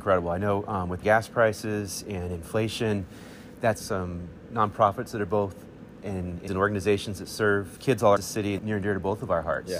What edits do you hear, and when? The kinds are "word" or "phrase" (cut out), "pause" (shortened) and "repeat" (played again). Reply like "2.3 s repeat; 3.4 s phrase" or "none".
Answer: 1.0 s word; 3.8 s word; 6.0 s word; 6.5 s word; 7.8 s word; 8.2 s word; 8.6 s word

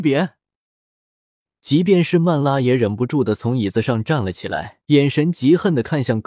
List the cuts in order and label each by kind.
4.8 s pause

